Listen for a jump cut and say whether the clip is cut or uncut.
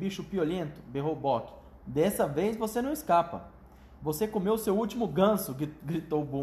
uncut